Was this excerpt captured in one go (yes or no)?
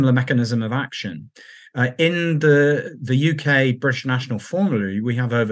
yes